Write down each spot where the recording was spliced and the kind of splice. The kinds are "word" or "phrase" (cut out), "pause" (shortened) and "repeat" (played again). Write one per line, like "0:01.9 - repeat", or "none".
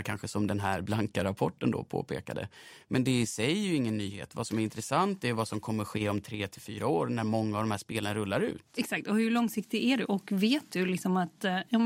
none